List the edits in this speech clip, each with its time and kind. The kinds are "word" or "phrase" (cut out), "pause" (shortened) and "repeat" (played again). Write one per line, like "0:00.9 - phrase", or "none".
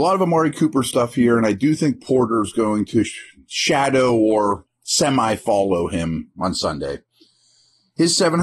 none